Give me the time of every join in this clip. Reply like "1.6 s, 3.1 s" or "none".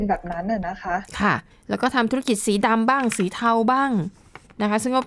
1.5 s

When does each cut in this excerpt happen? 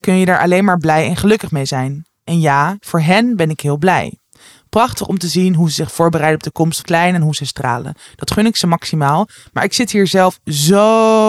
6.8 s

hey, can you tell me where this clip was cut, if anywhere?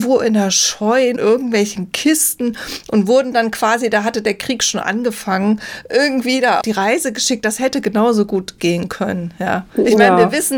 1.2 s, 6.6 s, 8.6 s

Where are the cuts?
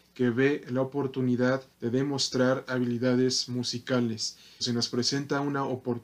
1.7 s, 2.7 s, 4.6 s

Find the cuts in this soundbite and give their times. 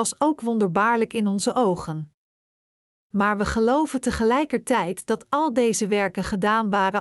none

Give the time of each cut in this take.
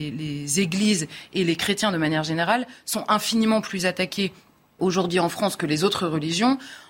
4.8 s

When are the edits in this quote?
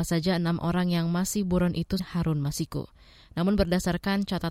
2.0 s

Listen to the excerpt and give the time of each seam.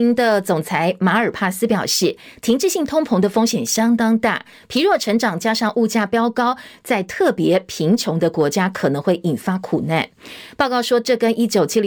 none

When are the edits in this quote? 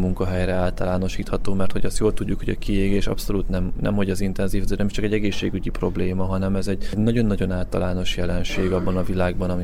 none

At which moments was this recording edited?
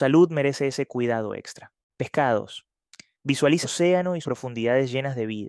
3.6 s, 4.2 s

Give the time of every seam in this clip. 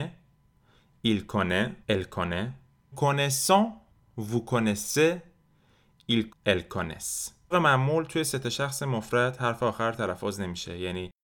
1.8 s, 2.9 s, 3.9 s, 6.3 s, 7.5 s

